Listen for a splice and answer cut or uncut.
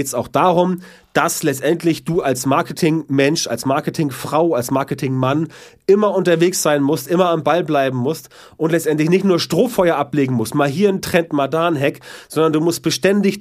uncut